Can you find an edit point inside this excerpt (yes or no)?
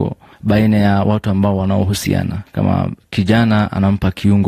no